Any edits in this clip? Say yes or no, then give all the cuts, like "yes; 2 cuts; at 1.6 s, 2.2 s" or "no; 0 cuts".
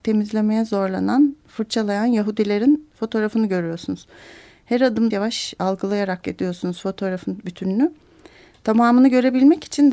yes; 2 cuts; at 5.1 s, 6.2 s